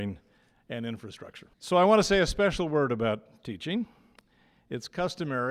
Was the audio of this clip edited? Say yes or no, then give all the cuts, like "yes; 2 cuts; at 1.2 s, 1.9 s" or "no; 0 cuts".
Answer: yes; 1 cut; at 1.5 s